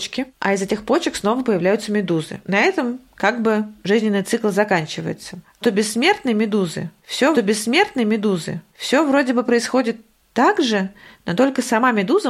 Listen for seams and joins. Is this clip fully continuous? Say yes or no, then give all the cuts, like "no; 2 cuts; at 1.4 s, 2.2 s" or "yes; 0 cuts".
no; 2 cuts; at 5.6 s, 7.3 s